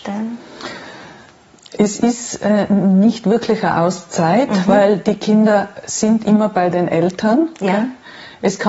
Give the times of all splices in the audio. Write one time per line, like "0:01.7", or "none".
none